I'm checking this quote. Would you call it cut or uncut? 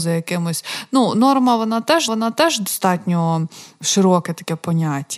cut